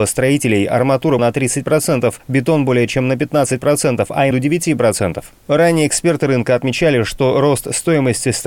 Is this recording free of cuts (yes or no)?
no